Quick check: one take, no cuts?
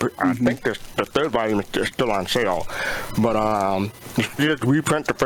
yes; 0 cuts

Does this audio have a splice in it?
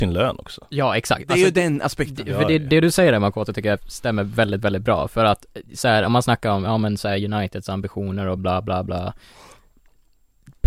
no; 0 cuts

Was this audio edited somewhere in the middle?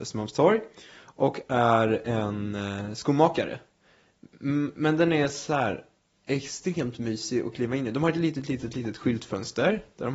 no; 0 cuts

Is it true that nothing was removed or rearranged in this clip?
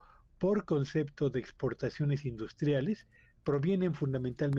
yes; 0 cuts

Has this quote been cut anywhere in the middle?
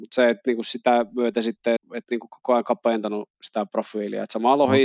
yes; 1 cut; at 1.8 s

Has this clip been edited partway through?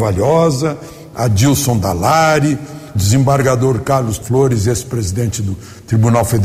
yes; 3 cuts; at 1.1 s, 3.0 s, 4.2 s

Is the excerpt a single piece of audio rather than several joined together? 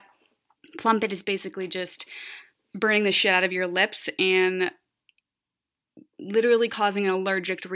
yes; 0 cuts

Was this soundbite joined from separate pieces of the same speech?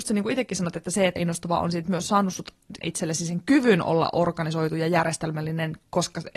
yes; 2 cuts; at 1.2 s, 2.8 s

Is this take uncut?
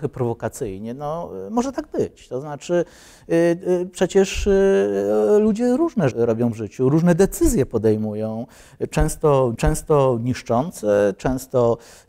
no; 2 cuts; at 6.1 s, 9.6 s

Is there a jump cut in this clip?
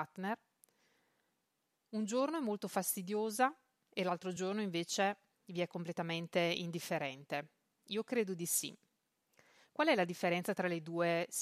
no; 0 cuts

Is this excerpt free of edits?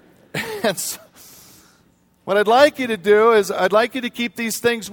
yes; 0 cuts

